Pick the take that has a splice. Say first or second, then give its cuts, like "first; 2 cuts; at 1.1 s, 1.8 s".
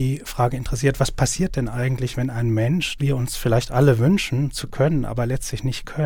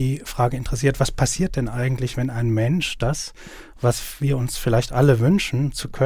first; 1 cut; at 3.0 s